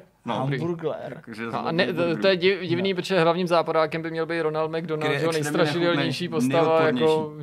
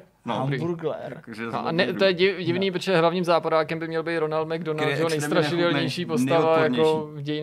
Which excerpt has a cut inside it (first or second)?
second